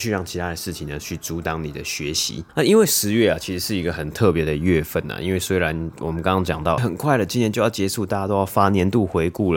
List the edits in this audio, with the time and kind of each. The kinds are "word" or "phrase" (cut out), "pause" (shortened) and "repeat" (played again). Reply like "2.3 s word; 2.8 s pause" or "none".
2.5 s pause; 6.8 s word